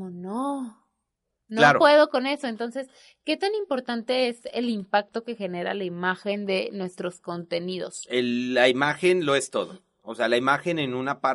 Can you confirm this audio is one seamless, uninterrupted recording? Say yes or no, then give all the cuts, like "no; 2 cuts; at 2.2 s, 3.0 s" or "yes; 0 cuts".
yes; 0 cuts